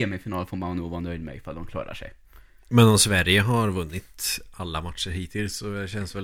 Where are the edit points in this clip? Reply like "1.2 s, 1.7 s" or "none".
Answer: none